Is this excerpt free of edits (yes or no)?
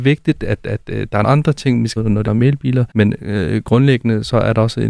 no